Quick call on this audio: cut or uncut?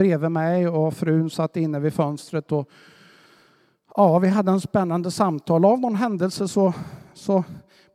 uncut